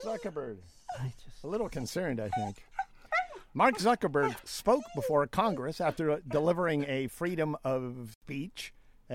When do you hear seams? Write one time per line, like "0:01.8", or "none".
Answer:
0:08.1